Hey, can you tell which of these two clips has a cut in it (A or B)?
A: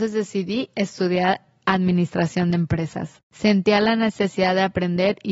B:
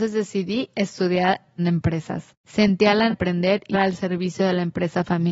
B